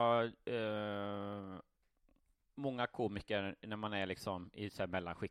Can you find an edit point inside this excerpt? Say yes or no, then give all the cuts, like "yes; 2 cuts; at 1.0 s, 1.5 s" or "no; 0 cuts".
no; 0 cuts